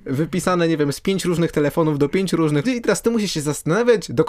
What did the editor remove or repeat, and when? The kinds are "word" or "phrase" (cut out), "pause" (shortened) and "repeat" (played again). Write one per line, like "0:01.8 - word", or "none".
0:02.6 - word